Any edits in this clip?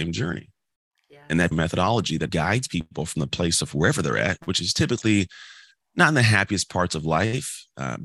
yes; 2 cuts; at 1.5 s, 2.3 s

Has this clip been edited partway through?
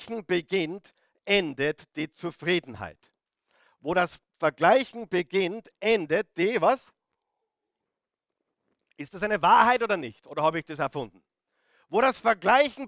no; 0 cuts

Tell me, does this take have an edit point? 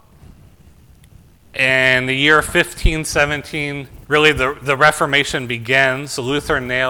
yes; 1 cut; at 4.0 s

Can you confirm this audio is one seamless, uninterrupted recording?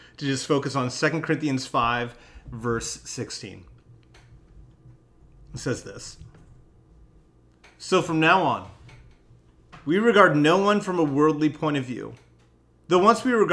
yes; 0 cuts

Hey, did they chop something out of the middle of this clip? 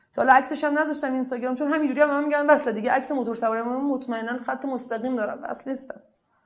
no; 0 cuts

